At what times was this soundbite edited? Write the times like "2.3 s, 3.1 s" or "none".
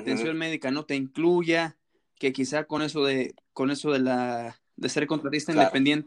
none